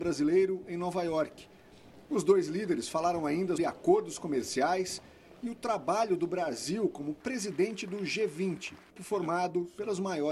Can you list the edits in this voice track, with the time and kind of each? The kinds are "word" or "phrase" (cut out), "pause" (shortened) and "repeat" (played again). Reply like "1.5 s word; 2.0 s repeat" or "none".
3.6 s word; 9.0 s word

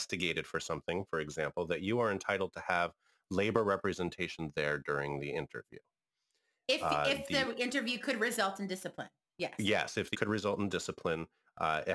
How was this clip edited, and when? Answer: 10.1 s word

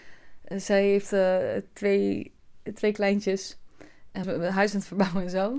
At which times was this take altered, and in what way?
4.2 s phrase

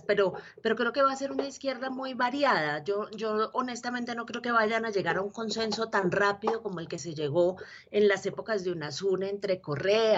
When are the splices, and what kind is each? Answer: none

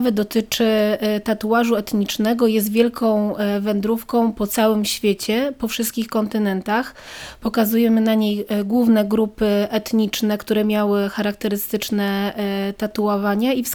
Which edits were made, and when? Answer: none

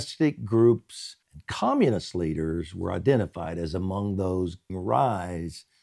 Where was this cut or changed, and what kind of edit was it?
1.2 s pause; 4.7 s word

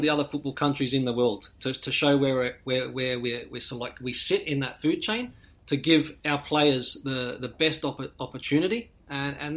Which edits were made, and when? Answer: 5.4 s pause

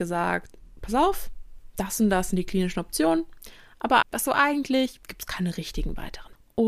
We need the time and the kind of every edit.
4.0 s word

